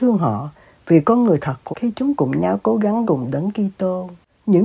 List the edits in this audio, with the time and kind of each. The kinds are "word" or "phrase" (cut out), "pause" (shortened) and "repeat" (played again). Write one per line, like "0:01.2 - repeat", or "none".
0:01.7 - word
0:02.2 - word
0:03.0 - word